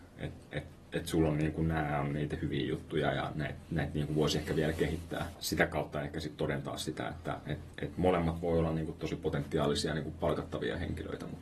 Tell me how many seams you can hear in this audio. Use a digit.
1